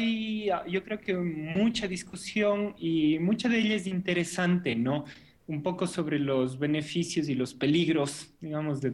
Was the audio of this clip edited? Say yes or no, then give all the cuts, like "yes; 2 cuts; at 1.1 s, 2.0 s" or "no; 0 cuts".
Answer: no; 0 cuts